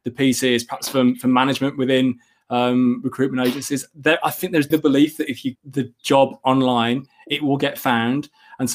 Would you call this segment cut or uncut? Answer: cut